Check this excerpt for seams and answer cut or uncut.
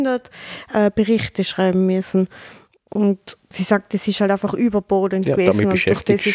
uncut